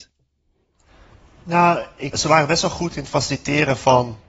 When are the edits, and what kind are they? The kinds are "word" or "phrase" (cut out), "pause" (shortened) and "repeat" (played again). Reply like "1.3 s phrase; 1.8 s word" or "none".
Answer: 2.1 s word